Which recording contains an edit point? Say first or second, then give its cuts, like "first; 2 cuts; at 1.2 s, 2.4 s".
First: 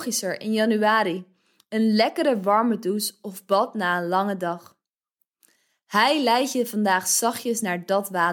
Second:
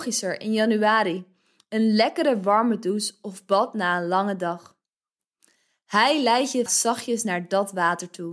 second; 1 cut; at 6.7 s